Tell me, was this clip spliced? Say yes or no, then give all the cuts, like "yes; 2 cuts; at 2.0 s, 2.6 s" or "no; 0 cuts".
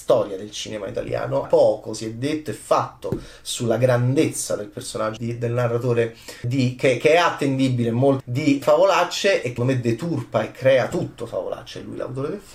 yes; 6 cuts; at 1.4 s, 5.2 s, 6.4 s, 8.2 s, 8.6 s, 9.6 s